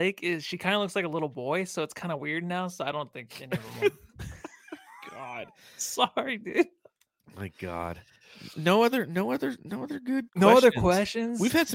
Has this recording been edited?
yes; 2 cuts; at 8.5 s, 10.3 s

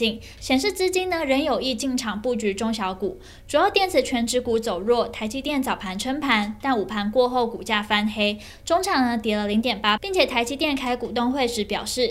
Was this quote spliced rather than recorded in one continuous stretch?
yes; 1 cut; at 10.0 s

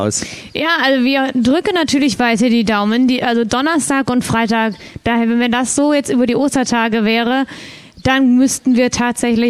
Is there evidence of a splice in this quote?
no; 0 cuts

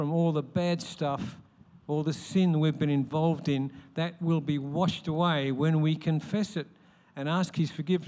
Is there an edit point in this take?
no; 0 cuts

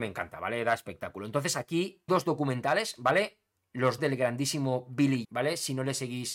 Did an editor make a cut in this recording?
yes; 3 cuts; at 2.1 s, 4.0 s, 5.2 s

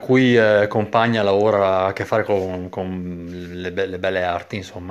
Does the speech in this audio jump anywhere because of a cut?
no; 0 cuts

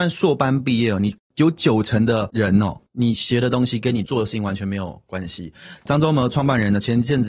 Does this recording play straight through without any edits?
no; 1 cut; at 2.9 s

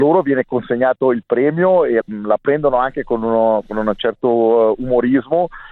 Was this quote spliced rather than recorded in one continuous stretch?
yes; 1 cut; at 2.0 s

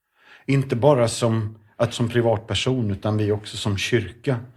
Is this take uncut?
no; 1 cut; at 1.9 s

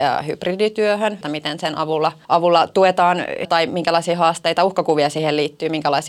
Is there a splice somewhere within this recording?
yes; 3 cuts; at 1.2 s, 2.2 s, 3.4 s

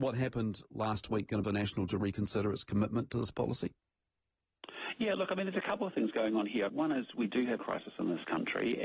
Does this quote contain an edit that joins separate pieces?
yes; 3 cuts; at 1.4 s, 6.7 s, 7.6 s

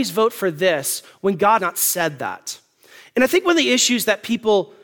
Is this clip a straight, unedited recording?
no; 1 cut; at 1.6 s

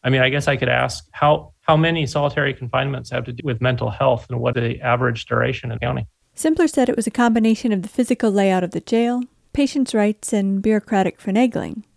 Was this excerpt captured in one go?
no; 5 cuts; at 1.1 s, 1.6 s, 3.4 s, 4.5 s, 5.8 s

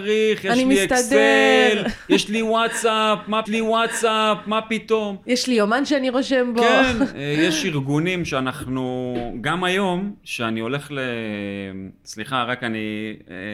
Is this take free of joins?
no; 1 cut; at 3.4 s

